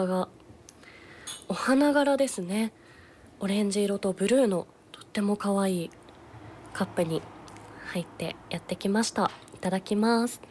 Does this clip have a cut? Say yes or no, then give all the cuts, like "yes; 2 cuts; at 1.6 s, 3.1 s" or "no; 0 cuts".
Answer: no; 0 cuts